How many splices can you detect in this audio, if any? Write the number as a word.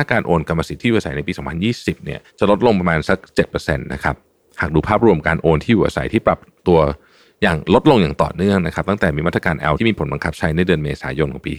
two